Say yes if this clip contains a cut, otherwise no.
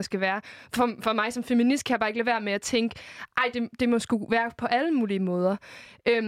no